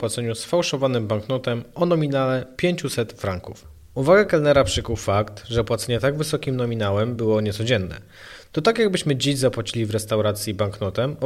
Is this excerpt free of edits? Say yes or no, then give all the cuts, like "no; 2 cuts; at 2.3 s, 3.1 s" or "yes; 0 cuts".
yes; 0 cuts